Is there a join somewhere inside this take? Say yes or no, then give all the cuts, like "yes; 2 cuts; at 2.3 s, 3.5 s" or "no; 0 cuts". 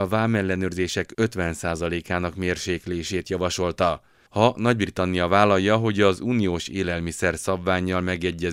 no; 0 cuts